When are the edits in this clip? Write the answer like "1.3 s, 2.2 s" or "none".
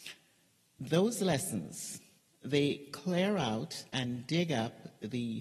2.2 s, 3.9 s